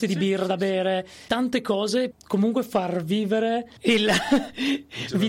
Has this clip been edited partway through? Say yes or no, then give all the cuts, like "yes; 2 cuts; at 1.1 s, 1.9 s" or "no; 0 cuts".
yes; 3 cuts; at 1.3 s, 2.1 s, 3.8 s